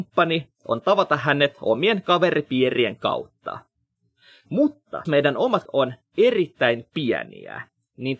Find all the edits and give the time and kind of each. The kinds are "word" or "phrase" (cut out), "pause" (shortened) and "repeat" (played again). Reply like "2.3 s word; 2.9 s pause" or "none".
5.1 s word; 5.6 s word